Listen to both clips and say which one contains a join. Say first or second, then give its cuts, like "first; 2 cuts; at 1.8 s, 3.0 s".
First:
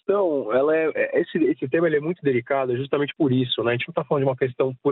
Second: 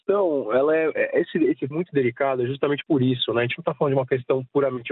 second; 1 cut; at 1.7 s